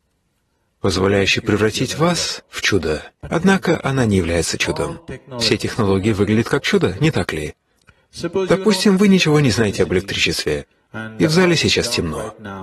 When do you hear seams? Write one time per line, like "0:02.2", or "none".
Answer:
none